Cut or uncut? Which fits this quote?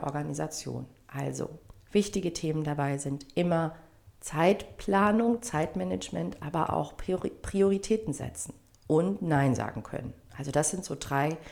cut